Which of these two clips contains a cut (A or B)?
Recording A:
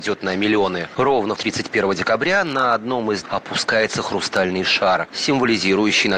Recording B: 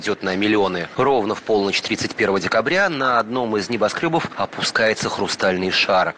A